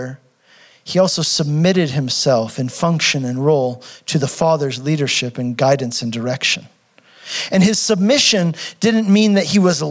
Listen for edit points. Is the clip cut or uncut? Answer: uncut